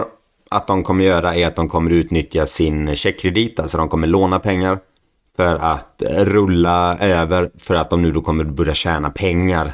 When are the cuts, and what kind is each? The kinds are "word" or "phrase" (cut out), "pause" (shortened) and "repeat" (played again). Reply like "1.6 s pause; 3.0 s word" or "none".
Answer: none